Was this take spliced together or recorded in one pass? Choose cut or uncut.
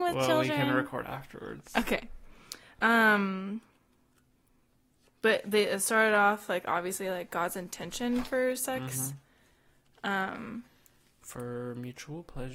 cut